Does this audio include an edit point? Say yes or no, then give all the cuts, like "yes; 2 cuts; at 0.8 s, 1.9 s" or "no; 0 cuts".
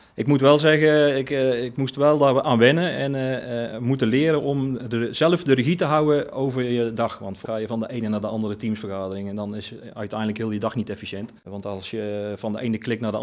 yes; 2 cuts; at 7.4 s, 11.4 s